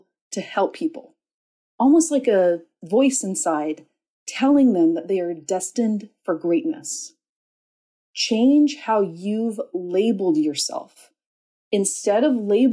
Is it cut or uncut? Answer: uncut